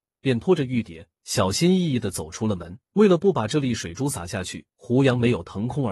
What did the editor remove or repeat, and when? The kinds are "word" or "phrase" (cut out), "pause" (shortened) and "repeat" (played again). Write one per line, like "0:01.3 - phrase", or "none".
0:02.8 - pause
0:04.7 - pause